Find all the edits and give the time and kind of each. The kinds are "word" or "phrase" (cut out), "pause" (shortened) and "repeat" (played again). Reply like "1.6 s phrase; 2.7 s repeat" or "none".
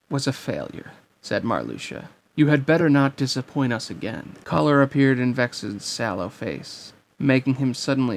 none